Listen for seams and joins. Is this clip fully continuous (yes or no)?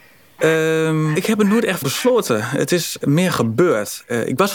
no